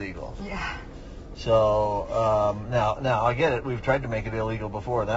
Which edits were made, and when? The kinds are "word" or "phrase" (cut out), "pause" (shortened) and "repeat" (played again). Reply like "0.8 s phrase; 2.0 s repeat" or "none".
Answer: 2.9 s word